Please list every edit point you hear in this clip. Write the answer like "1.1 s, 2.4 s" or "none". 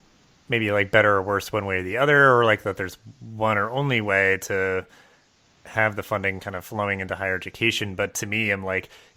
none